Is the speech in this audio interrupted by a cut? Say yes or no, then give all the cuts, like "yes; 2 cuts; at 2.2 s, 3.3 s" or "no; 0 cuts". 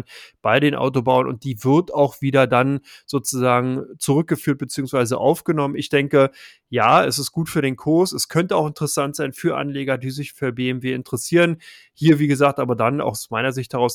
no; 0 cuts